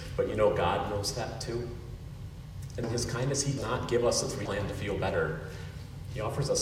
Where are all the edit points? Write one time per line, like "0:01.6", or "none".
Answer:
0:02.8
0:03.6
0:04.5